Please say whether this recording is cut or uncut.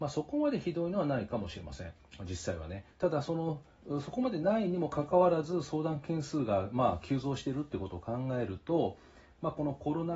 cut